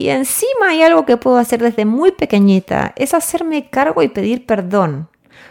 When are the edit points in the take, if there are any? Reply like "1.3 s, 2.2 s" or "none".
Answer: none